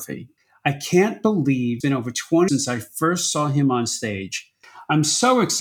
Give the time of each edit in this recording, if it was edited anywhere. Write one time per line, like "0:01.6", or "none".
0:01.8
0:02.5